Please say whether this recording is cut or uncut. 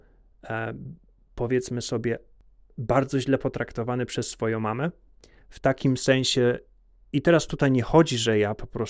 uncut